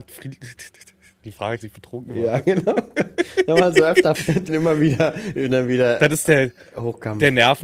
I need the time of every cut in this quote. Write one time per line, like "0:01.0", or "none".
0:01.6
0:04.1
0:04.5